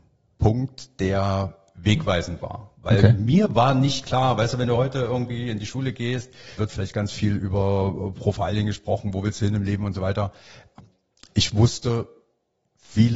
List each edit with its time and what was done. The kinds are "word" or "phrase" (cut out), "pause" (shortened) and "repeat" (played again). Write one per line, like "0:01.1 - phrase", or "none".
0:06.6 - phrase